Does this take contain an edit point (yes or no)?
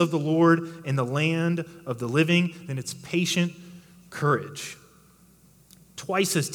no